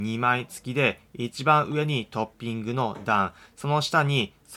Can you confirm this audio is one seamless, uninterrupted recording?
yes; 0 cuts

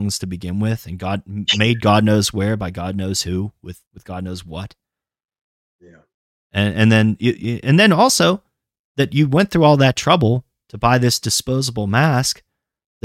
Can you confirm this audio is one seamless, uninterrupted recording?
no; 1 cut; at 3.9 s

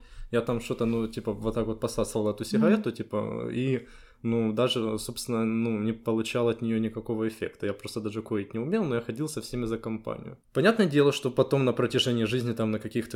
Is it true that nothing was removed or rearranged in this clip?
no; 1 cut; at 10.4 s

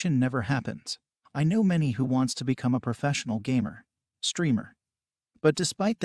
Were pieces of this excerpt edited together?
no; 0 cuts

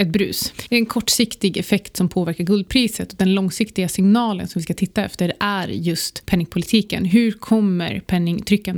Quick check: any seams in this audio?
no; 0 cuts

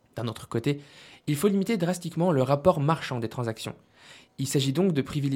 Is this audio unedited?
yes; 0 cuts

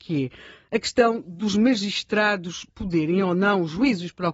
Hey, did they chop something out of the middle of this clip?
no; 0 cuts

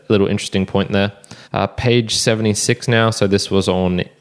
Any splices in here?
yes; 1 cut; at 1.4 s

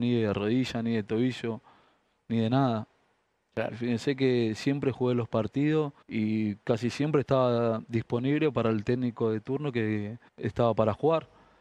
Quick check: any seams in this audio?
yes; 2 cuts; at 6.0 s, 10.3 s

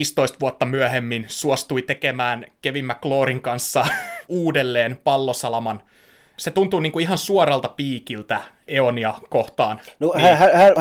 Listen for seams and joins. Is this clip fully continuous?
yes; 0 cuts

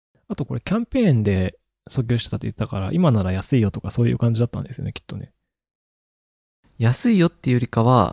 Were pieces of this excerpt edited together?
no; 0 cuts

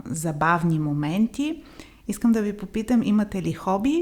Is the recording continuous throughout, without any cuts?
yes; 0 cuts

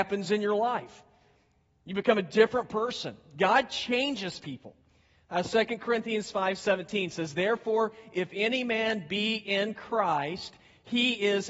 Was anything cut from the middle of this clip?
no; 0 cuts

